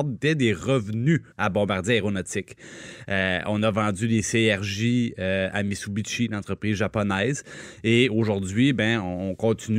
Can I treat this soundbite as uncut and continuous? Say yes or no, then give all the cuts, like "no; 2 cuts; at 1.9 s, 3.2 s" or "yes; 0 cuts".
no; 1 cut; at 1.3 s